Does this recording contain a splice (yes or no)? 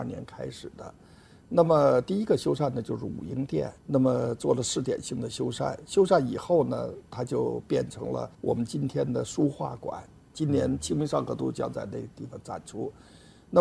yes